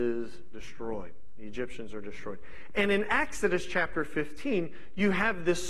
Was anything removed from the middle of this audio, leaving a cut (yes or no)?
no